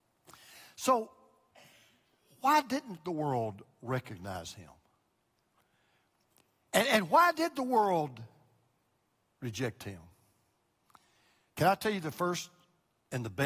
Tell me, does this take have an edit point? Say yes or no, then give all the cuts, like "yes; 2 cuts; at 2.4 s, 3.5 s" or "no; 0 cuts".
no; 0 cuts